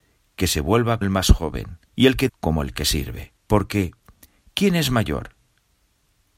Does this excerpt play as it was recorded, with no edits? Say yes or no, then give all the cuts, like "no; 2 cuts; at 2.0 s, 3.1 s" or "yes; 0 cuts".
no; 4 cuts; at 1.0 s, 1.9 s, 2.3 s, 3.4 s